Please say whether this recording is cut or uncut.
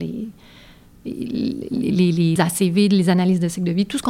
cut